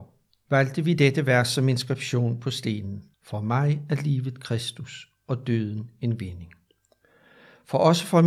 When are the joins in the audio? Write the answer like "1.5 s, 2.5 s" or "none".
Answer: 3.1 s